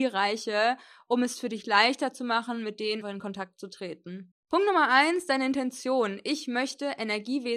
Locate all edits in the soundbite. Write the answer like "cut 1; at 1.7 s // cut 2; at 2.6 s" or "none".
cut 1; at 3.0 s // cut 2; at 4.4 s